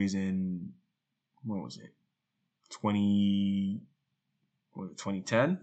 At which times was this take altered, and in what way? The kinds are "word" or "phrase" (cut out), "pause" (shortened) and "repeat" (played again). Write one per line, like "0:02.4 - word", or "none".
none